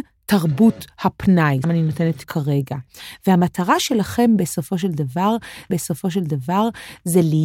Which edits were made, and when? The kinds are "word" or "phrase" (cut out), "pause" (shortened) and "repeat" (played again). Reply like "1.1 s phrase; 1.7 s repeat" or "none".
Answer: 1.6 s word; 2.2 s word; 5.7 s repeat